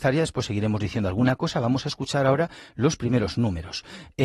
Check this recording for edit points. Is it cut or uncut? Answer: uncut